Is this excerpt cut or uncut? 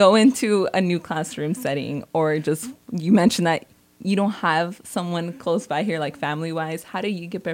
uncut